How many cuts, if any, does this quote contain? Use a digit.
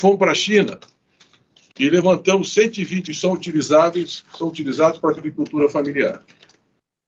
2